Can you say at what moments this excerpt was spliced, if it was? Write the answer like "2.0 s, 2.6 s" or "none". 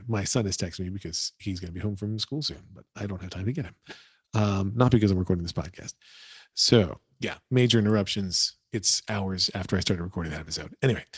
none